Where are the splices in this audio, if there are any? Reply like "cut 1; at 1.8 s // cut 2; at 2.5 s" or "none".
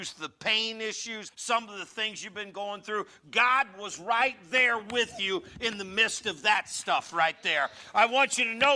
cut 1; at 1.3 s